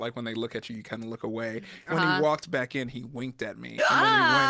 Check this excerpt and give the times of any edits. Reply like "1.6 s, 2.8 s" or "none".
1.9 s

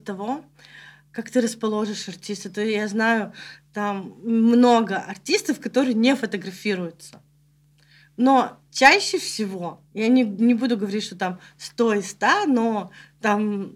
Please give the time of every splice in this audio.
8.7 s, 9.9 s

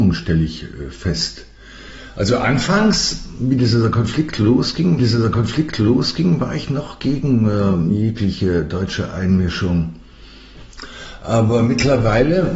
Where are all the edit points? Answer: 5.0 s

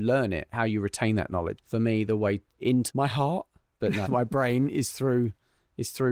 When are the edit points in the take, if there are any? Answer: 1.6 s, 2.9 s, 4.1 s

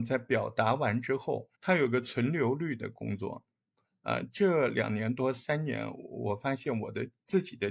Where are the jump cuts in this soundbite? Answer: 1.5 s

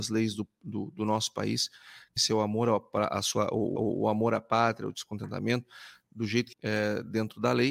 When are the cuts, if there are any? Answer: 2.2 s, 3.8 s, 6.5 s

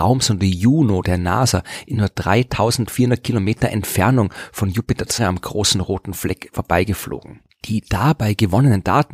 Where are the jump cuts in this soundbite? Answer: 5.2 s

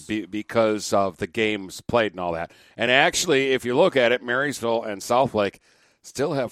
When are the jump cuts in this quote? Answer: none

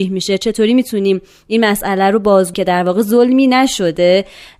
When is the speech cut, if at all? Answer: 2.5 s

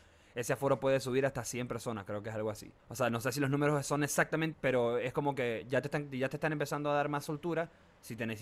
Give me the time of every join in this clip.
2.8 s, 4.5 s

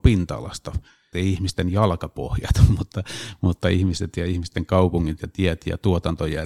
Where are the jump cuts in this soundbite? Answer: 1.1 s

